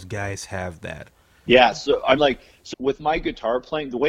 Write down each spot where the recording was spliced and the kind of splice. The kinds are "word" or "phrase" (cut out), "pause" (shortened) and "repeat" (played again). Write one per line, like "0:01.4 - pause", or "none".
0:01.5 - word
0:02.2 - word
0:02.7 - word